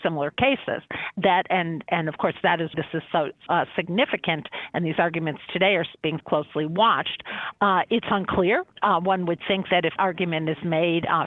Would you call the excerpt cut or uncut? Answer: cut